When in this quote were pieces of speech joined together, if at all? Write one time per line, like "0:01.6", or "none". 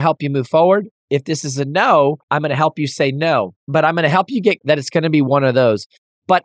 0:02.2
0:03.6
0:04.6